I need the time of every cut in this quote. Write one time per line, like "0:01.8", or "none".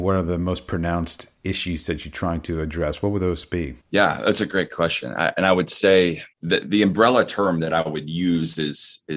0:03.8
0:06.3